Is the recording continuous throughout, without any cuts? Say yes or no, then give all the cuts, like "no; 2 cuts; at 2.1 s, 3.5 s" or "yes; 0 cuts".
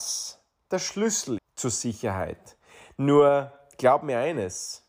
no; 1 cut; at 1.4 s